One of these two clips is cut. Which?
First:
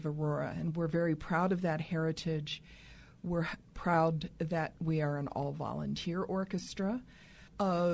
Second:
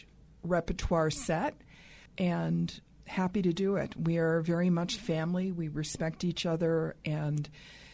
second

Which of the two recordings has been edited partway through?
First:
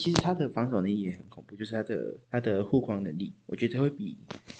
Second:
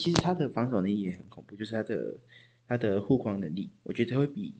first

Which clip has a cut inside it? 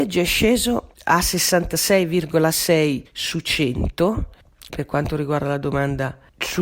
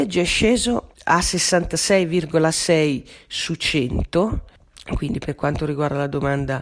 first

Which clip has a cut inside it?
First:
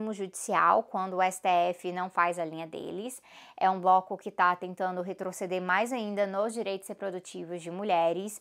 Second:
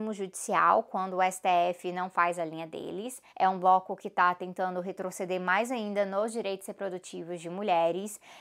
second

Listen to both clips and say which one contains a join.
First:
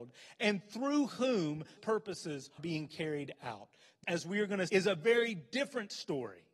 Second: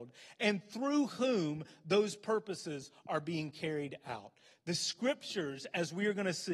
first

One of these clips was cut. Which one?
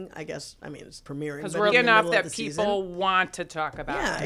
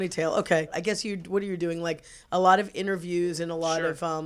first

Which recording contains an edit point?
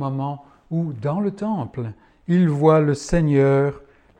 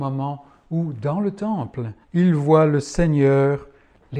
second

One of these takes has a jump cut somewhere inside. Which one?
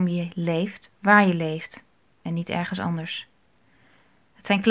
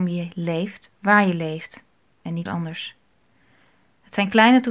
second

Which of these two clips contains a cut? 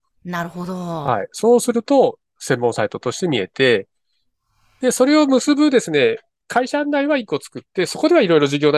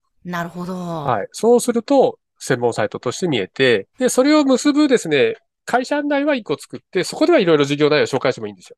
second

